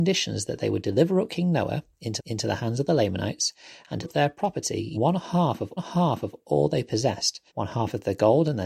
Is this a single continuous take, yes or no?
no